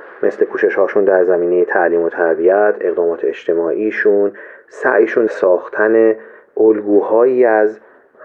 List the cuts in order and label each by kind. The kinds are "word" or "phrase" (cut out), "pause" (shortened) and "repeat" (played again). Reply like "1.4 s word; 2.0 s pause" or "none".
5.3 s word